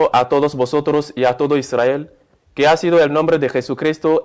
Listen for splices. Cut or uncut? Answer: uncut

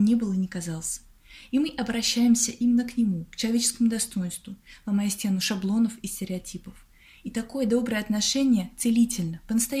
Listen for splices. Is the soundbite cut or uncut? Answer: uncut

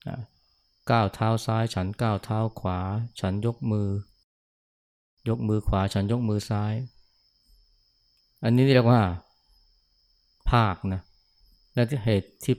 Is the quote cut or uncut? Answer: uncut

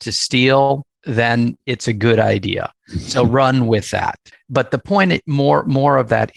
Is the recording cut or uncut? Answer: uncut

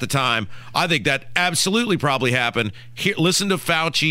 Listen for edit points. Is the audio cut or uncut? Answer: uncut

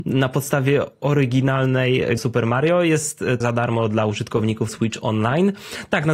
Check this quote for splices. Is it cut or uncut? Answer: cut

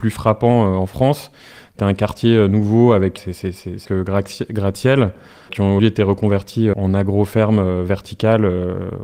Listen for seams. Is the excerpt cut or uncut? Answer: cut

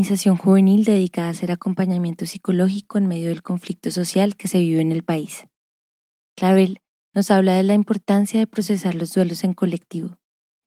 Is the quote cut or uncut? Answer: uncut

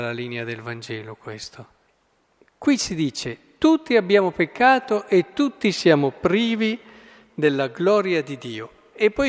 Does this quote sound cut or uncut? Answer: cut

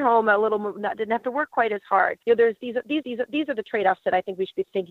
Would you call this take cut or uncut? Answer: cut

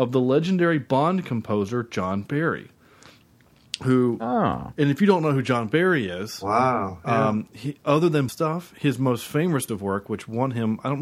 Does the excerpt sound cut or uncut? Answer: cut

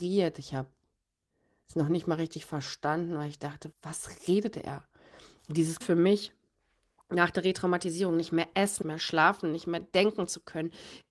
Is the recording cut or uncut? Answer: cut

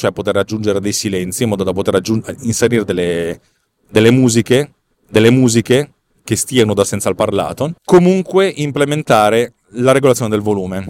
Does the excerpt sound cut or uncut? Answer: cut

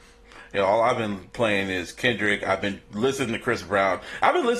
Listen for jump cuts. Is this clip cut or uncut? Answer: uncut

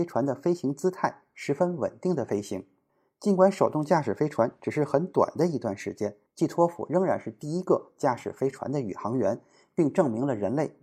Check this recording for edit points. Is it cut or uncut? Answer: cut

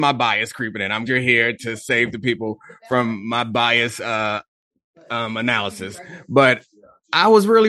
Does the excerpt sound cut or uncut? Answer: cut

